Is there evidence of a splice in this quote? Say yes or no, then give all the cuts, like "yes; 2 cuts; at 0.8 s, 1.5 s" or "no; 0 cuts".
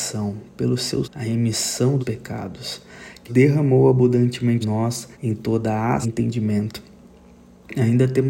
yes; 6 cuts; at 1.0 s, 2.0 s, 3.3 s, 4.6 s, 5.1 s, 6.0 s